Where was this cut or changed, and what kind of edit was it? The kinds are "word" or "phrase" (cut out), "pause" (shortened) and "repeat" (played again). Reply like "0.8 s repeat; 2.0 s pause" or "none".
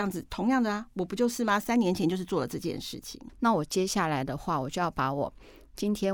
none